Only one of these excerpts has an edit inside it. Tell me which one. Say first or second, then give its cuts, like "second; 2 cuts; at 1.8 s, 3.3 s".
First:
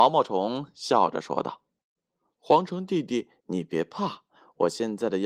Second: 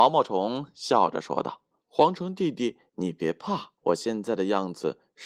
second; 2 cuts; at 1.7 s, 3.8 s